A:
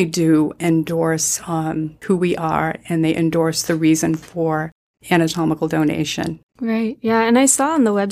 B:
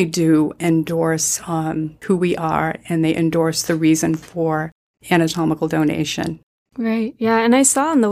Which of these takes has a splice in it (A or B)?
A